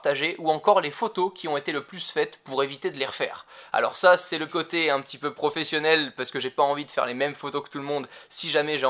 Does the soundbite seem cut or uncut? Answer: cut